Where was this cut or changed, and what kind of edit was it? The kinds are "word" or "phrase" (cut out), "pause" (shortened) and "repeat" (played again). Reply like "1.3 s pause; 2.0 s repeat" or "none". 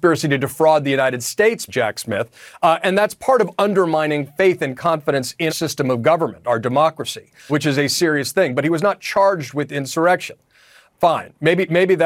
1.7 s word; 5.5 s word; 7.5 s word